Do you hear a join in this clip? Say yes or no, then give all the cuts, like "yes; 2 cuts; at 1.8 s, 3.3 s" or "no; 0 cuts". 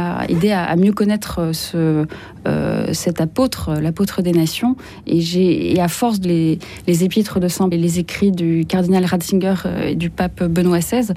yes; 2 cuts; at 6.2 s, 7.7 s